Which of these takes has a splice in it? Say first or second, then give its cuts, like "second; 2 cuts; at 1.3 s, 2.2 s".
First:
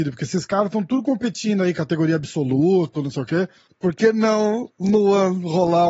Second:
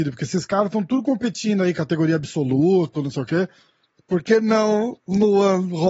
first; 1 cut; at 3.7 s